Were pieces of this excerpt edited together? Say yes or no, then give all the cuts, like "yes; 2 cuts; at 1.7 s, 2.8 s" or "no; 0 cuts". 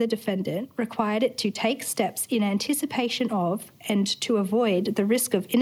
no; 0 cuts